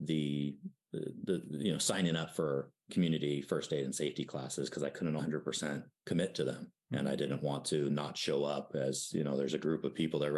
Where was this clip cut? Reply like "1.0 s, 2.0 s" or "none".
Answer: 5.2 s, 6.8 s

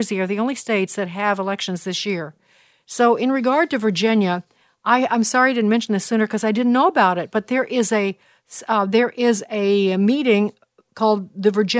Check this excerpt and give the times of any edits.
none

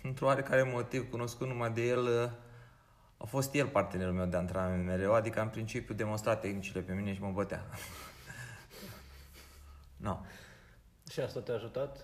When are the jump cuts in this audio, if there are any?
none

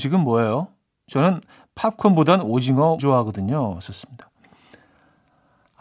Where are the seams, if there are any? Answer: 3.0 s

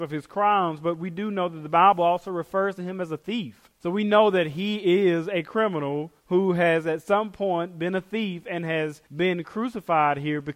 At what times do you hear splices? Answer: 3.7 s, 6.2 s, 9.1 s

